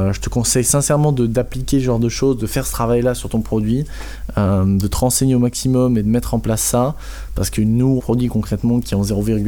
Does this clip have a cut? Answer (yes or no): yes